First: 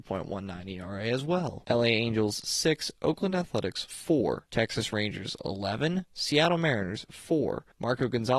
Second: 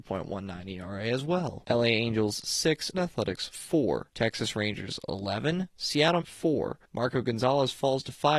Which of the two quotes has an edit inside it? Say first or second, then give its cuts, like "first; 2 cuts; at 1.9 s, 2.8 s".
second; 2 cuts; at 2.9 s, 6.2 s